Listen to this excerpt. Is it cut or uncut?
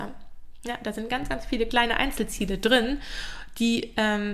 uncut